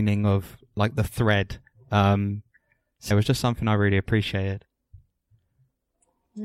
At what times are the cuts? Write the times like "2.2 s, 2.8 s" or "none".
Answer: 3.1 s